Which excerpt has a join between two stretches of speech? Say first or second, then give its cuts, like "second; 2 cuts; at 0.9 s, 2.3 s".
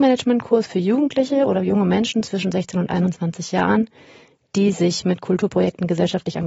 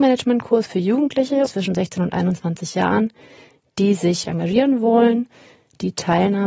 second; 2 cuts; at 1.5 s, 4.2 s